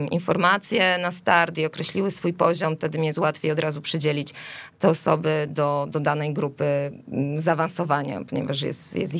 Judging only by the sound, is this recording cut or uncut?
uncut